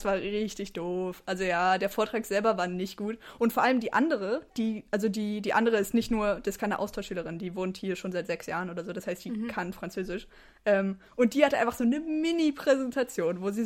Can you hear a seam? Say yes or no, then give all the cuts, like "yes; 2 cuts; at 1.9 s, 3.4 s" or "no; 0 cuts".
no; 0 cuts